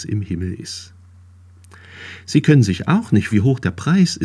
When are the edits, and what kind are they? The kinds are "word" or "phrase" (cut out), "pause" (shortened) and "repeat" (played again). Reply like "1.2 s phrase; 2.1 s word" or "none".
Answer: 3.3 s word